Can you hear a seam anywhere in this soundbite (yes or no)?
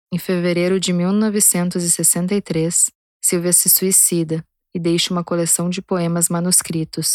no